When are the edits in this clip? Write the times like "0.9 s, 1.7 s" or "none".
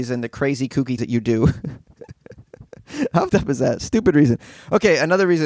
1.0 s, 3.3 s